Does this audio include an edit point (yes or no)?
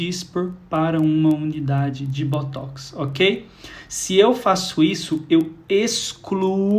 no